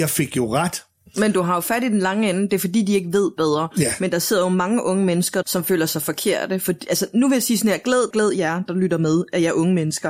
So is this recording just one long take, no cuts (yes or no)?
no